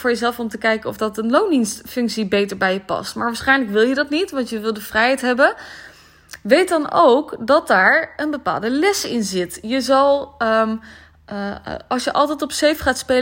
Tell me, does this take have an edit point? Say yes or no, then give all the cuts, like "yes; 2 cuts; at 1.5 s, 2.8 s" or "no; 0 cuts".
no; 0 cuts